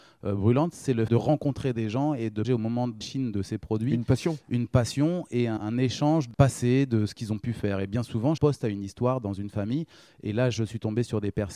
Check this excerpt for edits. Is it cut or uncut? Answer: cut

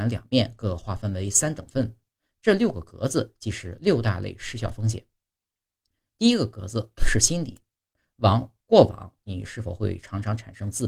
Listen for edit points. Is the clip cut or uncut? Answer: uncut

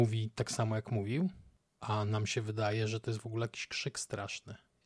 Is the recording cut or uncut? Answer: uncut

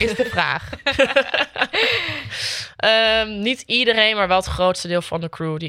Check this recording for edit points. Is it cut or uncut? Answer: uncut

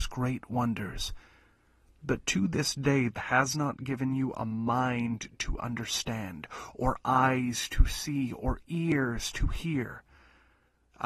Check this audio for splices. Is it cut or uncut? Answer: cut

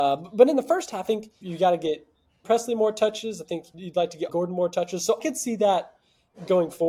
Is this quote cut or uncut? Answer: cut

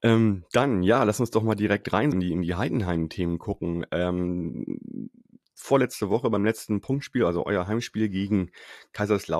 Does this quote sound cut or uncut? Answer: cut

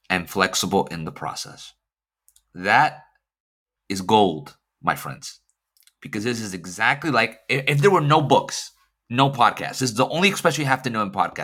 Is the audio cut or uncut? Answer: uncut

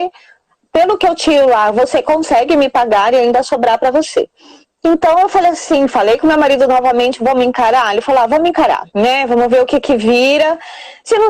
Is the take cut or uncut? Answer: cut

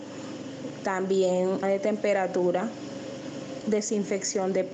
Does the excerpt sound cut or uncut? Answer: cut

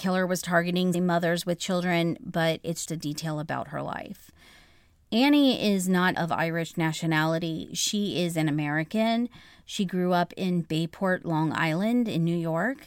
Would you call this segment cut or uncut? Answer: cut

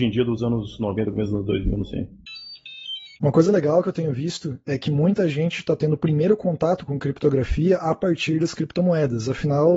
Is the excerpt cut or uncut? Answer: cut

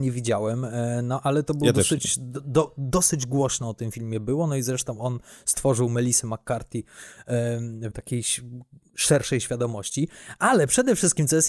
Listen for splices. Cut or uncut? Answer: cut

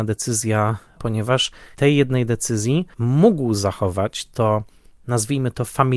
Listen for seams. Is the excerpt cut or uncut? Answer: cut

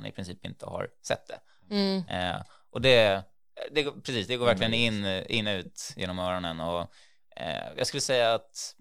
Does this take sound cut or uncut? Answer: uncut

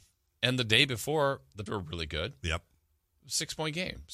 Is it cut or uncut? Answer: cut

